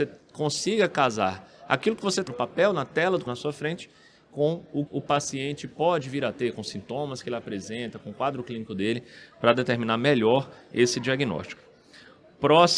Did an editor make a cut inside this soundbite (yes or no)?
yes